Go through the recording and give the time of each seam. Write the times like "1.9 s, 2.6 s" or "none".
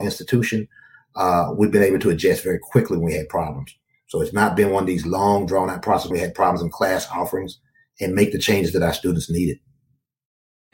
6.1 s